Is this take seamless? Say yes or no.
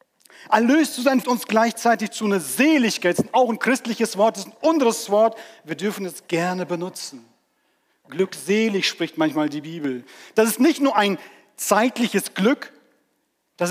no